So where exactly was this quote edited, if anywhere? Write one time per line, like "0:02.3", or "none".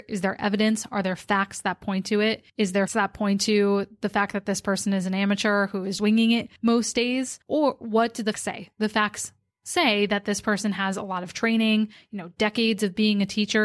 0:02.5
0:02.9
0:06.0
0:06.6
0:07.4
0:08.3